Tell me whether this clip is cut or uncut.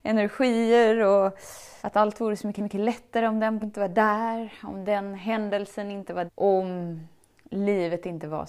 cut